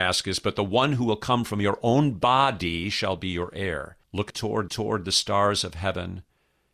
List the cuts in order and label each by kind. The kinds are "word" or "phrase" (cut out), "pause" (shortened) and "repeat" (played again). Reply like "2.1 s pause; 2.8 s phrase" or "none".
4.0 s pause; 4.7 s repeat